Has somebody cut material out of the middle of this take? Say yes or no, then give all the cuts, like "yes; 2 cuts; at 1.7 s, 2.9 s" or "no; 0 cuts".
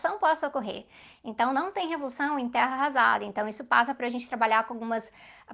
no; 0 cuts